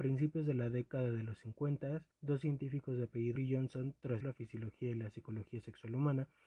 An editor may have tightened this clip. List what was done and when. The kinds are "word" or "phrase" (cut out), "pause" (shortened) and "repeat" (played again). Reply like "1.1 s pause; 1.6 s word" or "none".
2.1 s pause; 3.4 s word; 4.2 s word